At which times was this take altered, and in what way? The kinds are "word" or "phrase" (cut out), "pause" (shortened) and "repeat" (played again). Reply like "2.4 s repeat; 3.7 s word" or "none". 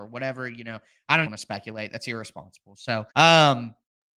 1.3 s word; 3.1 s pause